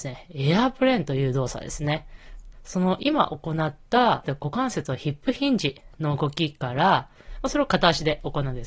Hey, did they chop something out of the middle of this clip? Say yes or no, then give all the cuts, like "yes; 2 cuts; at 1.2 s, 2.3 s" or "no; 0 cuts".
yes; 1 cut; at 4.2 s